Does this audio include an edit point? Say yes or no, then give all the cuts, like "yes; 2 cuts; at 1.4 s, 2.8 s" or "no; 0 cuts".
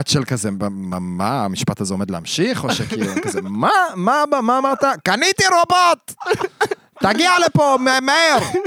no; 0 cuts